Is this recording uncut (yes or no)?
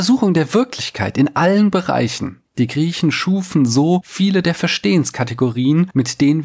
yes